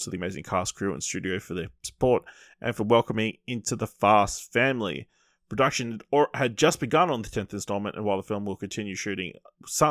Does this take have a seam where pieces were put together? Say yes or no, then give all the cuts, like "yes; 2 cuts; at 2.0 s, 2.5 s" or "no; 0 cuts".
no; 0 cuts